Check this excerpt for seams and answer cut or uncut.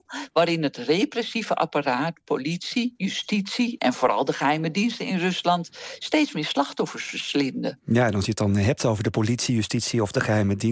uncut